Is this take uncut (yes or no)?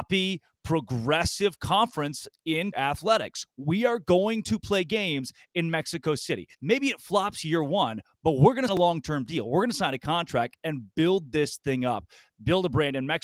no